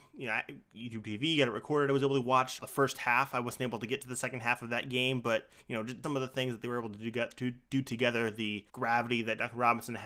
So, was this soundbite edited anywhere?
yes; 3 cuts; at 2.6 s, 6.0 s, 8.7 s

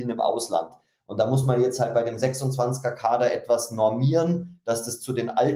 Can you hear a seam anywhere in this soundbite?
no; 0 cuts

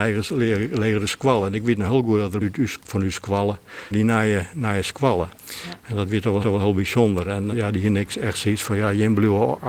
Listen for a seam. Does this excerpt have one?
yes; 6 cuts; at 2.4 s, 2.8 s, 3.9 s, 5.4 s, 6.4 s, 7.5 s

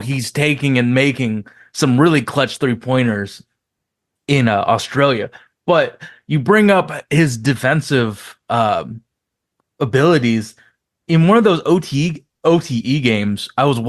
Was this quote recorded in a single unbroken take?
yes; 0 cuts

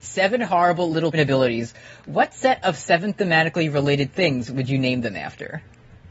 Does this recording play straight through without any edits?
no; 1 cut; at 1.1 s

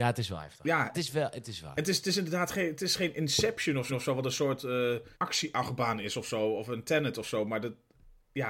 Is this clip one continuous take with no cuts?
no; 3 cuts; at 0.9 s, 3.9 s, 5.1 s

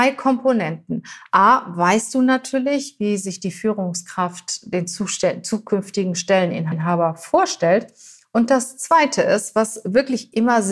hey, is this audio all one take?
yes; 0 cuts

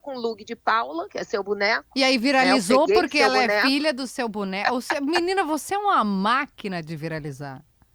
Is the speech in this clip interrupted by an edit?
no; 0 cuts

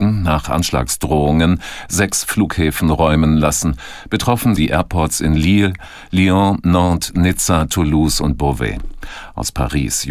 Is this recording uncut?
no; 1 cut; at 4.6 s

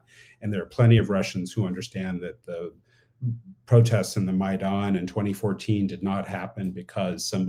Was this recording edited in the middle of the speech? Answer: no; 0 cuts

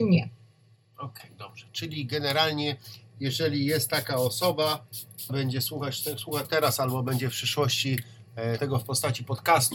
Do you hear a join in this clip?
yes; 3 cuts; at 5.3 s, 6.4 s, 8.6 s

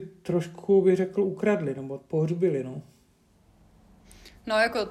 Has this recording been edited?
no; 0 cuts

